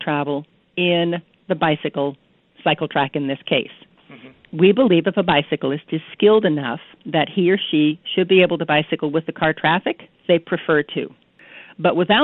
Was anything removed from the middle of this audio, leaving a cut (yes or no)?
yes